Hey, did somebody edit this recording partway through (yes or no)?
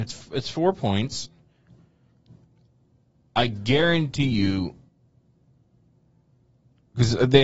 no